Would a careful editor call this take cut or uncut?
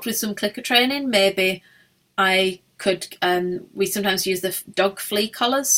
uncut